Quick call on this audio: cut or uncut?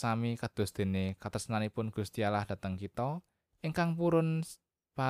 uncut